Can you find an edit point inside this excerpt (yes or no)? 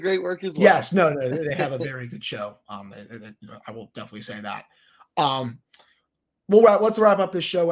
no